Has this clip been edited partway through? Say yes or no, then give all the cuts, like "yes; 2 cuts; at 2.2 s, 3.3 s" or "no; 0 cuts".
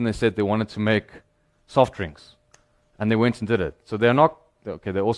no; 0 cuts